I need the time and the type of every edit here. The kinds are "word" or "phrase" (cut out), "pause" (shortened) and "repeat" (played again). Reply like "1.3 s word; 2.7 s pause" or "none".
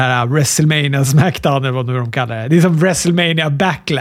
none